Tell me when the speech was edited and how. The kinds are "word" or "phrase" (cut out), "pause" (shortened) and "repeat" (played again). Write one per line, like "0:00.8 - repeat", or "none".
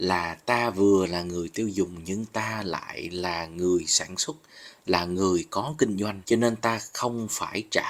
0:06.2 - pause